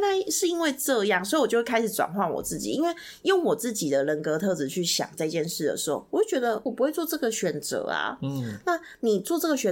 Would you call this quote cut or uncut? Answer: cut